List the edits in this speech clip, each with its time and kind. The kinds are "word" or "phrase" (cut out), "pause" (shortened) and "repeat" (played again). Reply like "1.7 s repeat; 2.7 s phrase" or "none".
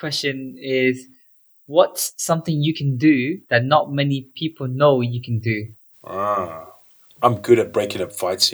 3.4 s pause

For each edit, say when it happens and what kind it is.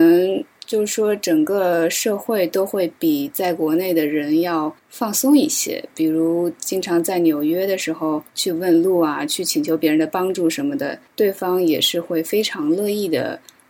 4.8 s pause; 8.3 s pause; 11.1 s pause

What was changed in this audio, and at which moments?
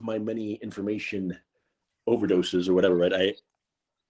none

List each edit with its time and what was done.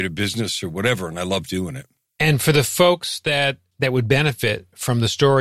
none

